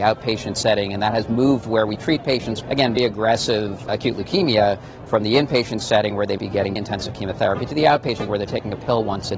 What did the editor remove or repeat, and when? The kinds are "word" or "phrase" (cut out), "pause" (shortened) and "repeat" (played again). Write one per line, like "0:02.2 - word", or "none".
0:02.6 - word
0:03.0 - word
0:03.9 - word
0:06.4 - word
0:06.8 - word
0:08.3 - word